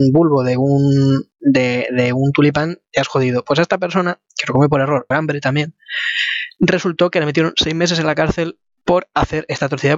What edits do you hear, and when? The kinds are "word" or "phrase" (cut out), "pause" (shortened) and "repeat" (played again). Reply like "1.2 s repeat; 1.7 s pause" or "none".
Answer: 5.1 s phrase

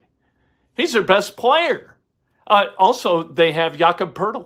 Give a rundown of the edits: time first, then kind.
none

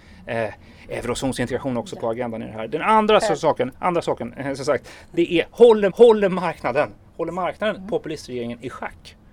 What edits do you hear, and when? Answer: 5.9 s repeat

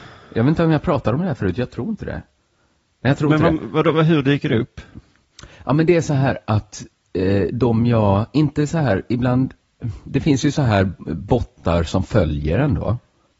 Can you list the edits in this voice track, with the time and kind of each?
none

